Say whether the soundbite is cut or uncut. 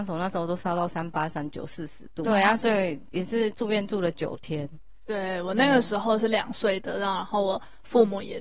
cut